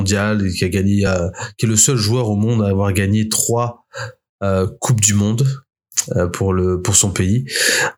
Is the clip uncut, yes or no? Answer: yes